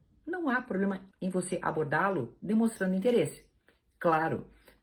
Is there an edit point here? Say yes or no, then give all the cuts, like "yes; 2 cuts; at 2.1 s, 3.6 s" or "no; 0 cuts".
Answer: yes; 1 cut; at 1.1 s